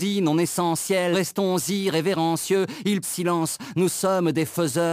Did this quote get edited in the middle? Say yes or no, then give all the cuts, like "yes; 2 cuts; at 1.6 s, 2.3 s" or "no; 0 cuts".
yes; 2 cuts; at 1.1 s, 3.0 s